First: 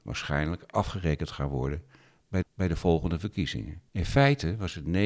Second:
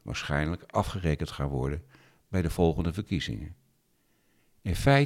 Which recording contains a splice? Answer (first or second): first